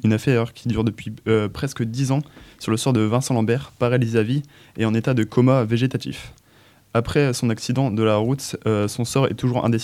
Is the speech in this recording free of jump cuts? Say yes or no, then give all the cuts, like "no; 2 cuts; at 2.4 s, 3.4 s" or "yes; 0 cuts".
yes; 0 cuts